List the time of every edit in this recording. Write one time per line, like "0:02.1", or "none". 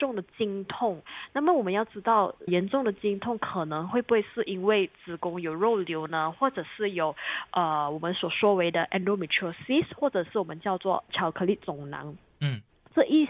0:02.5